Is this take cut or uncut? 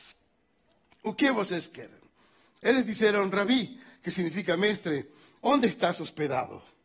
uncut